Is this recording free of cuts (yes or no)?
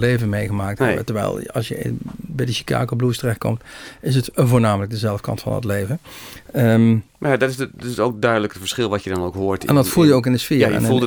no